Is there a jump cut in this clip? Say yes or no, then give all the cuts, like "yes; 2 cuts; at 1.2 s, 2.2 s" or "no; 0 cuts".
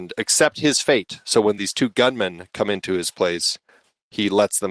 no; 0 cuts